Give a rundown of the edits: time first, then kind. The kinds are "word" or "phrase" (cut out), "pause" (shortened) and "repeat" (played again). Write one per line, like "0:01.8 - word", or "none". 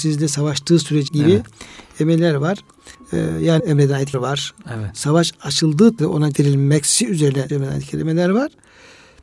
0:01.1 - word
0:02.9 - pause
0:03.6 - phrase
0:04.1 - word
0:06.0 - word
0:06.3 - word
0:07.5 - word

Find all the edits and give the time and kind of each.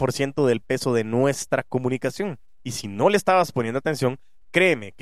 none

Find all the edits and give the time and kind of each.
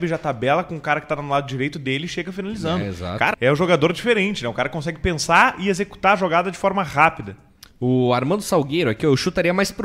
0:03.3 - phrase

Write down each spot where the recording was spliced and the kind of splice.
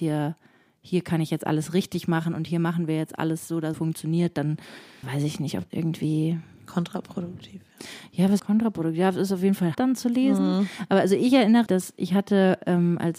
0:03.7 - word
0:05.0 - word
0:05.7 - word
0:08.4 - word
0:09.7 - word
0:11.7 - word

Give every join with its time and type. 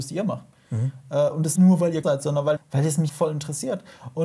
0:01.6 - word
0:02.0 - word
0:02.6 - word
0:03.1 - word

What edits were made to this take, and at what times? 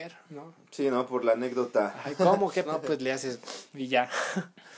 0:02.6 - word
0:03.7 - pause

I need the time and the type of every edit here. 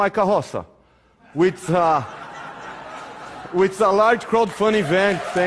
none

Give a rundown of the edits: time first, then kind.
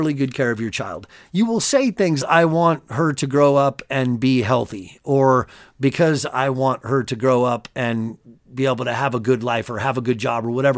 0:02.2 - phrase

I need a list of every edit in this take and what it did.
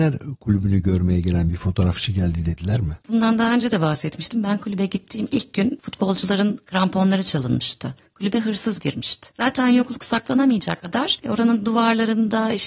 0:09.3 - pause

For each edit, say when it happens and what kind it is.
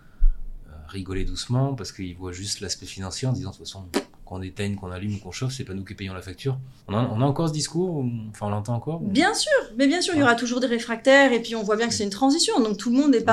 0:06.8 - pause

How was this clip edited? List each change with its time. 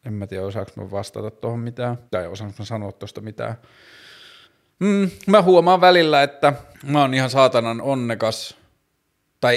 0:02.1 - pause
0:04.4 - pause
0:06.7 - pause

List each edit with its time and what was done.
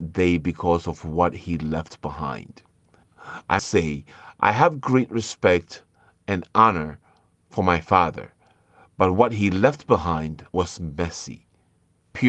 0:03.6 - word
0:10.5 - pause

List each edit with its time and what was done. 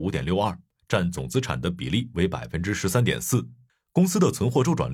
none

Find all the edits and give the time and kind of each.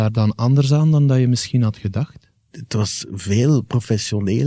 none

